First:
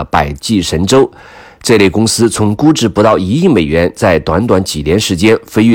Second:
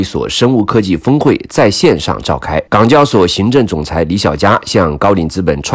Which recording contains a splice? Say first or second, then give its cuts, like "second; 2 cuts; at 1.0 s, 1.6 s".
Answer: second; 1 cut; at 2.7 s